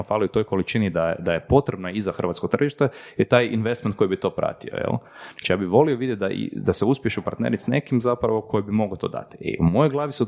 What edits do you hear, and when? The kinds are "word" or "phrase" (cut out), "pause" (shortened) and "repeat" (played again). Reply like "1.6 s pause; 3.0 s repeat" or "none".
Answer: none